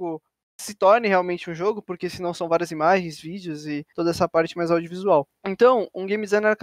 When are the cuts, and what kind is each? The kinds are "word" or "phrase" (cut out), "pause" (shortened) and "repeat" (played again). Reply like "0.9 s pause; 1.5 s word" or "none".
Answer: 3.9 s pause; 5.4 s pause